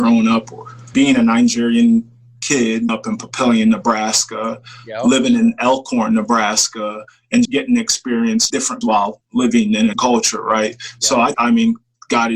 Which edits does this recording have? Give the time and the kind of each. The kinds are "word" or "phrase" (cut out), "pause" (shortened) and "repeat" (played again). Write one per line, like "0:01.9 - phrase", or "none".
0:00.9 - word
0:02.9 - word
0:07.4 - word
0:08.5 - word
0:08.8 - word
0:09.9 - word
0:11.3 - word